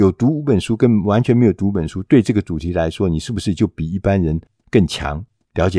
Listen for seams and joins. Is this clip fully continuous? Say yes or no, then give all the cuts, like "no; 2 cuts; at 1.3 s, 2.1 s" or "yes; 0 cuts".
yes; 0 cuts